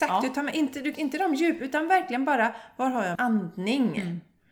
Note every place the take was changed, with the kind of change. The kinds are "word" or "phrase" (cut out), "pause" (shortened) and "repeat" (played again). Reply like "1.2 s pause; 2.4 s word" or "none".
0.9 s word; 3.1 s word